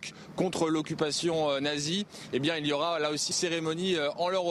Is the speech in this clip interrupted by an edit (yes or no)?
yes